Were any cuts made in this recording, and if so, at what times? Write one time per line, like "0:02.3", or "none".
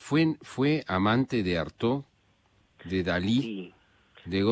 none

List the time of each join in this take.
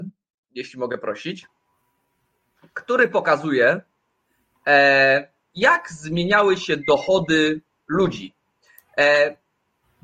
none

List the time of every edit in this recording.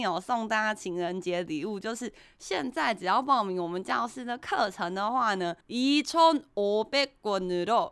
0:05.6

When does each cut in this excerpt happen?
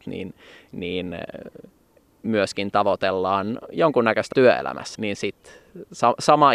0:01.7
0:04.3
0:04.9

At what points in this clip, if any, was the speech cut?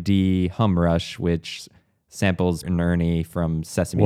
0:02.6

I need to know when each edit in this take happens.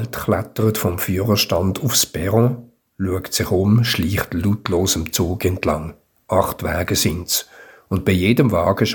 none

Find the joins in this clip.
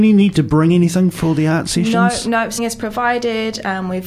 0:02.6

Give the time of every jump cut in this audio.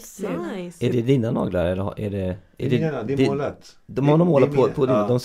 none

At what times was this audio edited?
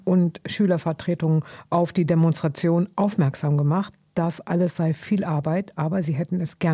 none

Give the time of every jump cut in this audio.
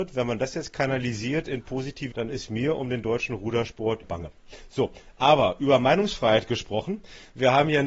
0:02.1
0:04.0

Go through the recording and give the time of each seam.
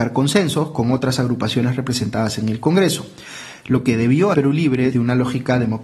0:04.3
0:04.9

